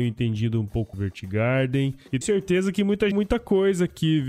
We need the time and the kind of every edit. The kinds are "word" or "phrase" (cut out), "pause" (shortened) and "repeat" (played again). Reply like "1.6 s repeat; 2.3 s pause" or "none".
0.9 s phrase; 2.2 s word; 3.1 s phrase